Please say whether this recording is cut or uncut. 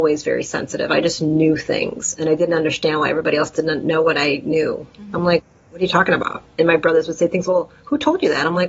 uncut